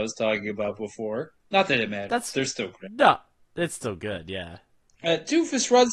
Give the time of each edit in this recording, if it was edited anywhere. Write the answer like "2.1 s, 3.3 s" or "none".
none